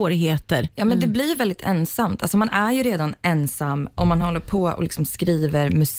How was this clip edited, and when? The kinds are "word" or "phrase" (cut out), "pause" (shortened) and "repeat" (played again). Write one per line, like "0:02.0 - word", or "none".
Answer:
none